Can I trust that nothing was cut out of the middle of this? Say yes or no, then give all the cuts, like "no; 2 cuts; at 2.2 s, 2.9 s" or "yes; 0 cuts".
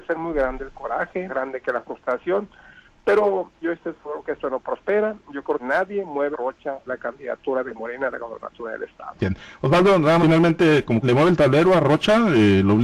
no; 7 cuts; at 1.3 s, 3.6 s, 5.6 s, 6.3 s, 6.9 s, 10.2 s, 11.0 s